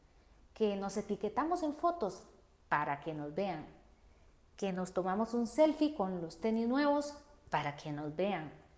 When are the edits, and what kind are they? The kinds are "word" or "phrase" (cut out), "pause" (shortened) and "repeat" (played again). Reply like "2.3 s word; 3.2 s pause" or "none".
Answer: none